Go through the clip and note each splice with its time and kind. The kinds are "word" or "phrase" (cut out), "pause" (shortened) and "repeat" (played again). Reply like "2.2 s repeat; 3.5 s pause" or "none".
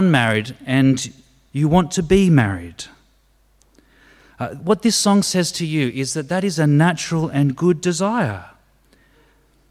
none